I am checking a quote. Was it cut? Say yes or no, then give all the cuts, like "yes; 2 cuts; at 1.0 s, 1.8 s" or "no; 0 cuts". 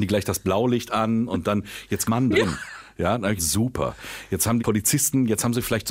yes; 3 cuts; at 2.1 s, 3.4 s, 4.6 s